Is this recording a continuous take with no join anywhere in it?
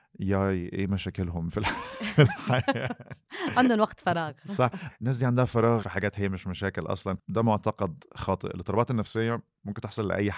no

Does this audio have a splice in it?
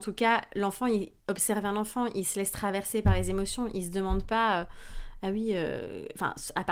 yes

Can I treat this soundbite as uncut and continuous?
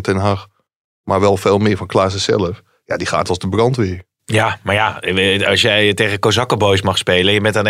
yes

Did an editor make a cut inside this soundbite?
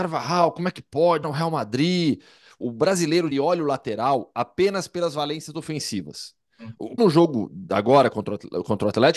yes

